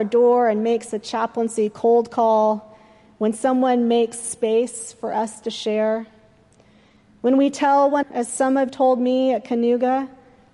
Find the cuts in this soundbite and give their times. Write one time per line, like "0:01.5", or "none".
0:08.0
0:08.7